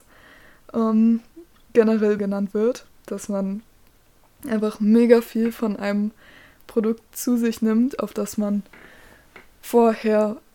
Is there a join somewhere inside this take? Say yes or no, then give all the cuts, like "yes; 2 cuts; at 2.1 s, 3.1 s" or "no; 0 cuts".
yes; 1 cut; at 2.2 s